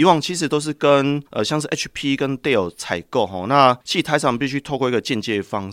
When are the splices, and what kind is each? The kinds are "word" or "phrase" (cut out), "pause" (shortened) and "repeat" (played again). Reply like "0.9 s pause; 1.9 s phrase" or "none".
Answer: 1.3 s pause; 3.8 s pause